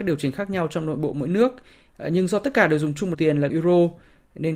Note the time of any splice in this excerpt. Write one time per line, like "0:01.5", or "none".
0:03.1
0:03.5